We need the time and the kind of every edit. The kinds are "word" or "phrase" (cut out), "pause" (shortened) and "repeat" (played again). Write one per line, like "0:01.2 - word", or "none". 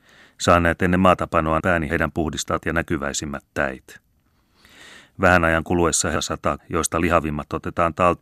0:01.6 - phrase
0:01.9 - phrase
0:02.6 - phrase
0:06.1 - phrase
0:06.6 - word